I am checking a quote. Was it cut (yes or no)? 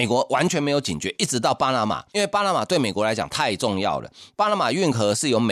yes